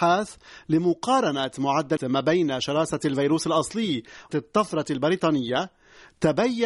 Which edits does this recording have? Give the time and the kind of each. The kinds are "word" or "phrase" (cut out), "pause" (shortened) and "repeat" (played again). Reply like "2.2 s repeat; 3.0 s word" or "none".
2.0 s word; 4.3 s word